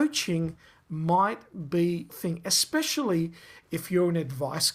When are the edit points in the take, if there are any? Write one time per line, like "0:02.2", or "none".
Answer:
0:02.1